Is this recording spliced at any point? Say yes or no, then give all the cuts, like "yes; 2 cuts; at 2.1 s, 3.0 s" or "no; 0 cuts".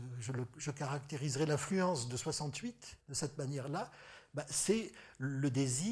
yes; 1 cut; at 3.0 s